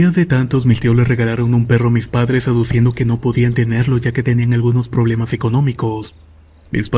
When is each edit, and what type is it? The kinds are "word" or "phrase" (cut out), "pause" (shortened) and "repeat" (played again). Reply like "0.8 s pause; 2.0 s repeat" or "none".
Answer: none